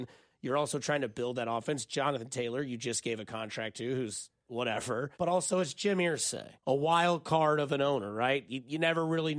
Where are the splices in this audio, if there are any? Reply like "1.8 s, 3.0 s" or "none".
5.1 s, 6.6 s